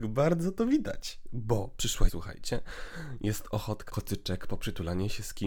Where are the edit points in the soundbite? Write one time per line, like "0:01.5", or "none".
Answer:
0:02.1
0:03.9